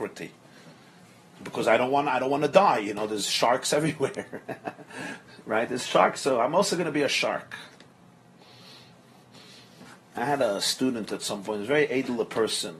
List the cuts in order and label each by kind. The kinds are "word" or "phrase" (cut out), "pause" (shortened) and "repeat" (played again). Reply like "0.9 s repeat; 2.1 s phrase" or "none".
none